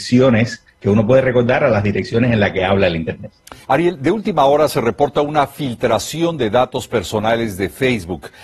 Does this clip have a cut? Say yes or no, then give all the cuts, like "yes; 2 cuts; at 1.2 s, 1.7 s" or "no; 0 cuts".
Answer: yes; 1 cut; at 3.6 s